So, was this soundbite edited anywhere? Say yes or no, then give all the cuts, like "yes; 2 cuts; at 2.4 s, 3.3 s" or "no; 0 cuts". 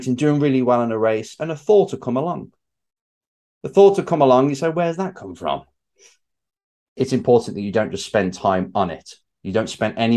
no; 0 cuts